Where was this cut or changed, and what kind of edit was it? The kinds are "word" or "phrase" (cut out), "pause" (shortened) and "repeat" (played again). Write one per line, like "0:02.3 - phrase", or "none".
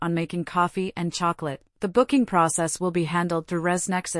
0:01.7 - pause